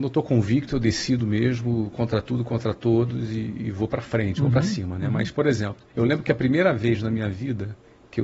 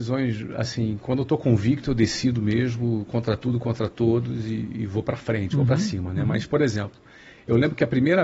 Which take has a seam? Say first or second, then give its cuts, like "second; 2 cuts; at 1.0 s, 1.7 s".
first; 1 cut; at 5.9 s